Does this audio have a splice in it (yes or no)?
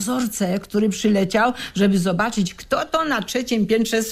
no